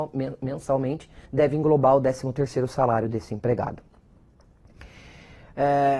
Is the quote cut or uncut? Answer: cut